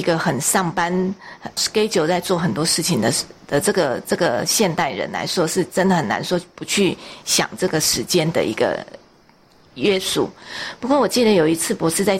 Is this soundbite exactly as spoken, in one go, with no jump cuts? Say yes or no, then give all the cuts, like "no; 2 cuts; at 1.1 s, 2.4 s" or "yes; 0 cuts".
no; 1 cut; at 1.6 s